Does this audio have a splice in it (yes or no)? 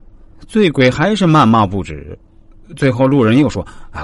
no